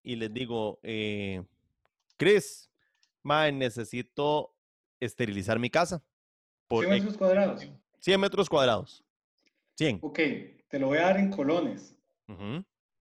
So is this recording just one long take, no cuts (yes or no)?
no